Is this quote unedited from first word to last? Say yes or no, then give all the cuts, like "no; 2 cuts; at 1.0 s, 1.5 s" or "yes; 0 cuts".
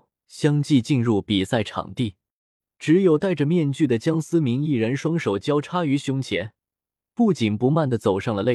yes; 0 cuts